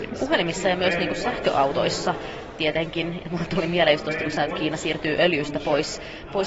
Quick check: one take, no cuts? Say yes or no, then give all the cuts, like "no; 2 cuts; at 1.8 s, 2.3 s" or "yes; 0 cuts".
yes; 0 cuts